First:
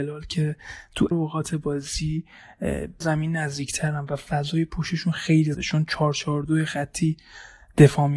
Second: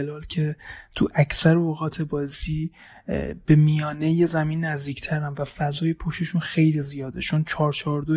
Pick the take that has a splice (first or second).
first